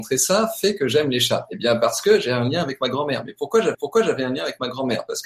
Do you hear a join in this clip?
yes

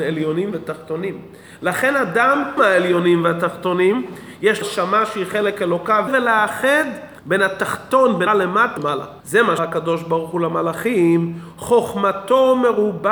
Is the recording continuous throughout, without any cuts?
no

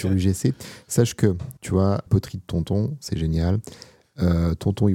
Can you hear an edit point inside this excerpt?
yes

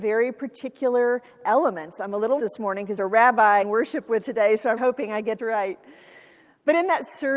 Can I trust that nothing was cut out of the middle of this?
no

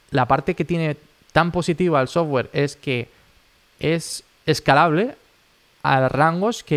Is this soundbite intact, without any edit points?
yes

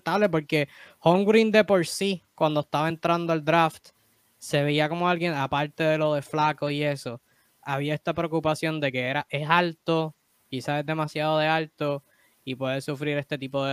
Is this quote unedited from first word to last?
yes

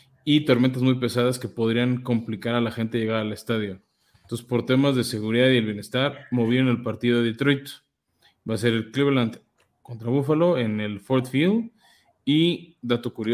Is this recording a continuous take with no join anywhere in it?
yes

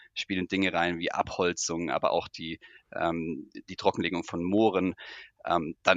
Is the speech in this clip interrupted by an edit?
no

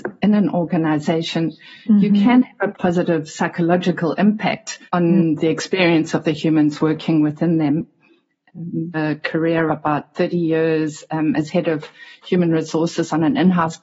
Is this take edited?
yes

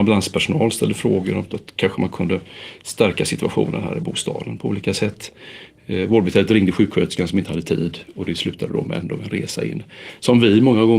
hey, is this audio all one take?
yes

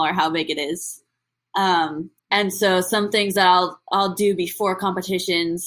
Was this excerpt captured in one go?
no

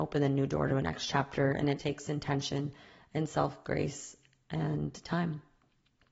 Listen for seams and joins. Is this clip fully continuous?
no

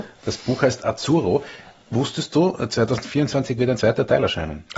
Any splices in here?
no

